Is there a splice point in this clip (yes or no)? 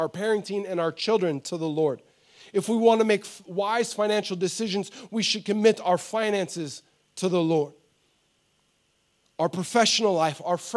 no